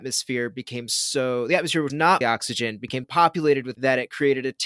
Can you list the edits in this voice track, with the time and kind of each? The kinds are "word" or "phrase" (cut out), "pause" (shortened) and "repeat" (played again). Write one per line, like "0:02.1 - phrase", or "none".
0:01.9 - word
0:02.2 - word
0:03.0 - word
0:03.7 - word